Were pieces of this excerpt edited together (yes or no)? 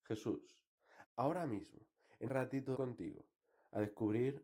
yes